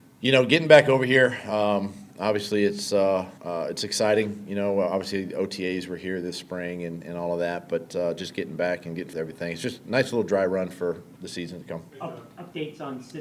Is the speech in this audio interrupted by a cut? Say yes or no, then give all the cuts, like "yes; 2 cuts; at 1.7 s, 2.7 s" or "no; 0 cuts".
yes; 4 cuts; at 3.4 s, 9.1 s, 11.2 s, 11.9 s